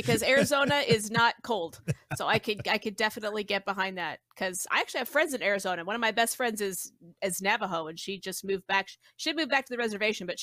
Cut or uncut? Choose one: uncut